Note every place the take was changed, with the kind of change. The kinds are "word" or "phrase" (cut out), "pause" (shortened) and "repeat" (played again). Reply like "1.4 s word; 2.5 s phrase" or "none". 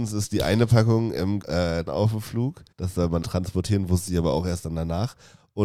1.4 s word; 1.9 s word; 2.7 s pause; 3.2 s phrase